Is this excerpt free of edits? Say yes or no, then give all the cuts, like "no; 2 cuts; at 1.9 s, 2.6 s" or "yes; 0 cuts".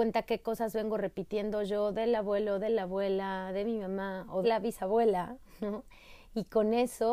no; 1 cut; at 4.4 s